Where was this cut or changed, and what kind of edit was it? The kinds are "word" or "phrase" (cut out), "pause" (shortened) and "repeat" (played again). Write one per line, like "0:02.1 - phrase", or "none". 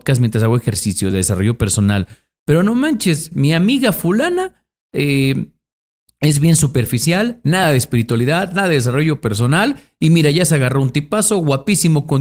none